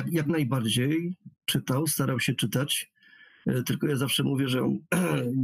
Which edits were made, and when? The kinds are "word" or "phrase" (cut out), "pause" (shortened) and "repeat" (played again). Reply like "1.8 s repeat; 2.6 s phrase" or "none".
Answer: 1.4 s pause